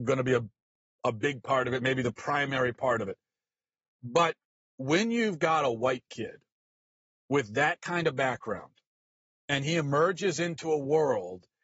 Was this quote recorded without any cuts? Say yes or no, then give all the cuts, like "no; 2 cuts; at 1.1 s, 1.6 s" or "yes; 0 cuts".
yes; 0 cuts